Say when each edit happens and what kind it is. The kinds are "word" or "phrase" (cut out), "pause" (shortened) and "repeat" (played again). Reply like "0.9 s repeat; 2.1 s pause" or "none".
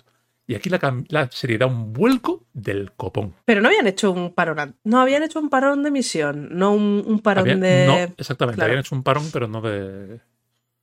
2.5 s pause; 3.4 s pause